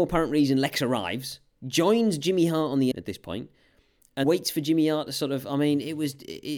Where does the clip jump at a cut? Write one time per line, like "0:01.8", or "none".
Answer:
0:02.9
0:04.2